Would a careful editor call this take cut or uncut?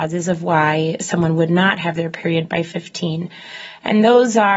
uncut